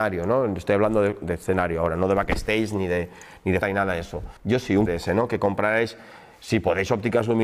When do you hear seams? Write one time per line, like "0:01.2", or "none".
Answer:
0:03.6
0:04.4
0:04.9